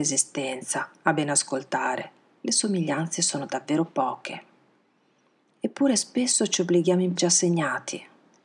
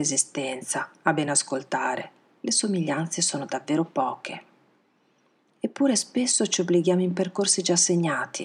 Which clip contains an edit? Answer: first; 1 cut; at 7.2 s

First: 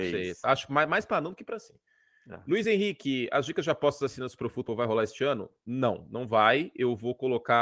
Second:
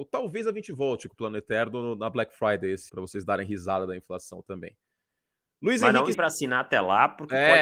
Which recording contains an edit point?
second; 2 cuts; at 2.9 s, 6.1 s

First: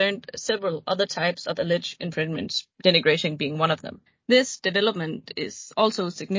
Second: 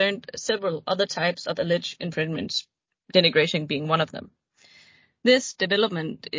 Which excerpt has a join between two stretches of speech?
first; 2 cuts; at 2.7 s, 4.1 s

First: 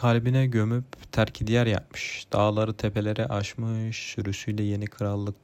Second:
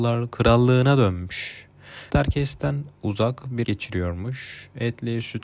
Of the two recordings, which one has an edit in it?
second; 3 cuts; at 2.1 s, 2.9 s, 3.6 s

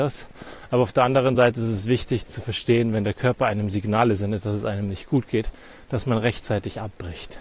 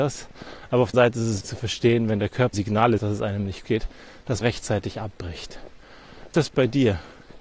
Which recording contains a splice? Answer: second; 7 cuts; at 0.9 s, 1.4 s, 2.5 s, 3.0 s, 3.6 s, 4.4 s, 6.3 s

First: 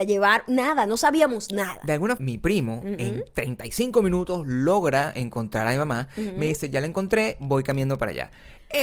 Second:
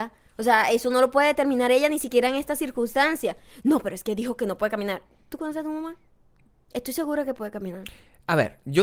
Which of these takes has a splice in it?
first; 1 cut; at 2.2 s

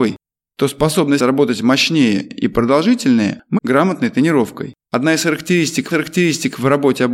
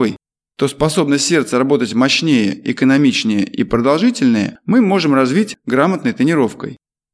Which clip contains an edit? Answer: first; 5 cuts; at 1.2 s, 2.3 s, 3.6 s, 4.8 s, 5.9 s

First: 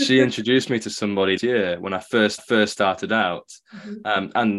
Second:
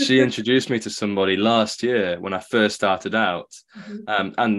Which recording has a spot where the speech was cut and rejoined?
first; 2 cuts; at 1.4 s, 2.4 s

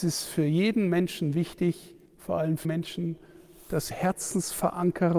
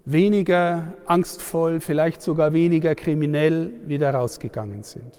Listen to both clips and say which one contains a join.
first; 3 cuts; at 2.1 s, 2.6 s, 3.9 s

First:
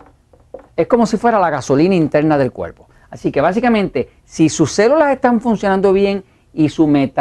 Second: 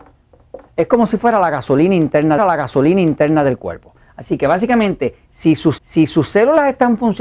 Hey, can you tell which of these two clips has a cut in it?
second; 2 cuts; at 2.4 s, 5.8 s

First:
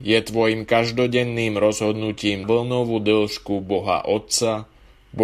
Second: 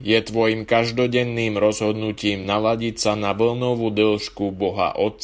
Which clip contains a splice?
first; 1 cut; at 2.4 s

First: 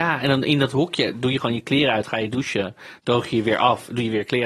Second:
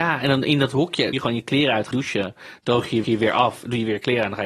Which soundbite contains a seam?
second; 3 cuts; at 1.1 s, 1.9 s, 3.0 s

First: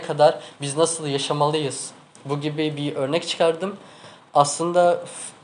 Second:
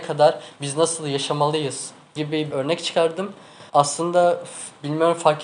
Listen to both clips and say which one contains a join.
second; 3 cuts; at 2.2 s, 2.5 s, 3.7 s

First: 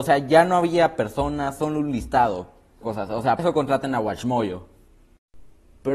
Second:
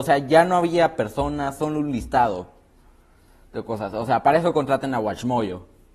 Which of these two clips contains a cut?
first; 2 cuts; at 2.8 s, 3.4 s

